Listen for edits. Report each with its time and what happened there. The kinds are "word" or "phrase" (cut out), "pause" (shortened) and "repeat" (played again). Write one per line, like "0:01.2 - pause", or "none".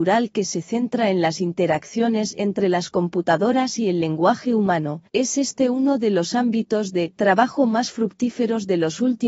0:05.1 - pause